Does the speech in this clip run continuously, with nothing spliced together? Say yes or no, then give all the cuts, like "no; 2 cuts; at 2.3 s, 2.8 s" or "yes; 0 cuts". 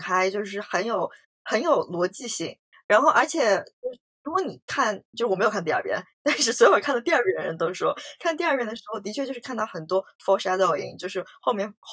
yes; 0 cuts